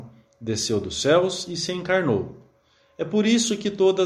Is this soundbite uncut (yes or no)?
yes